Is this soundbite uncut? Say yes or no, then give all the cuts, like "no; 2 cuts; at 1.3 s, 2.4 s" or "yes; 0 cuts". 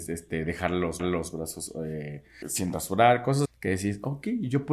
no; 3 cuts; at 1.0 s, 2.4 s, 3.4 s